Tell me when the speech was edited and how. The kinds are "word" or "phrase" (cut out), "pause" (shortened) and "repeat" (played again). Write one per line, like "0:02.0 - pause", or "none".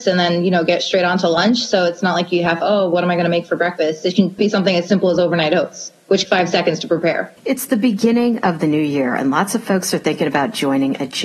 0:02.6 - phrase
0:04.4 - word
0:06.2 - phrase
0:07.4 - pause